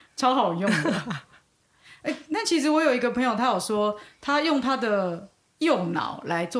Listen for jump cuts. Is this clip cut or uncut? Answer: uncut